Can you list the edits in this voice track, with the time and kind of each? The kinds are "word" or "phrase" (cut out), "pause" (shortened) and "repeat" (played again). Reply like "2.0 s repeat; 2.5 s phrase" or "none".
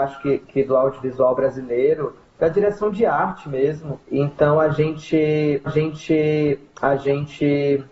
4.0 s pause; 5.7 s repeat